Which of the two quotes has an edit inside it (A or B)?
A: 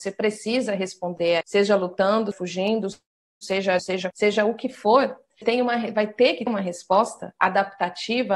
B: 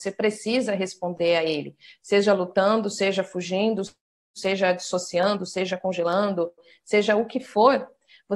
A